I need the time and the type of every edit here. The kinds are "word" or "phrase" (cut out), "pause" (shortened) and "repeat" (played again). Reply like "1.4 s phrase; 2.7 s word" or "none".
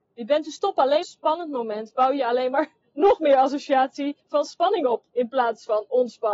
1.0 s phrase; 4.2 s pause; 5.1 s pause